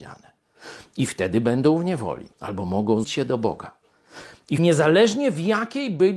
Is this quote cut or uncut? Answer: cut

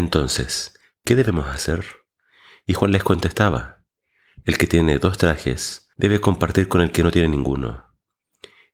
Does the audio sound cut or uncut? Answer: cut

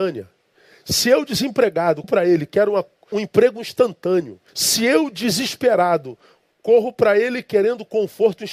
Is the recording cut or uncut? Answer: cut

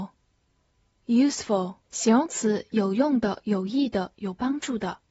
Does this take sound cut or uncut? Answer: cut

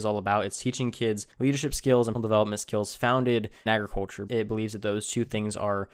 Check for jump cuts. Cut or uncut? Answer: cut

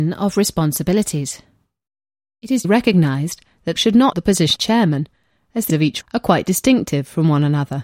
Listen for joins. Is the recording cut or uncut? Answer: cut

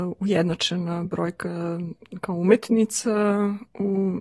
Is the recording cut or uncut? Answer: uncut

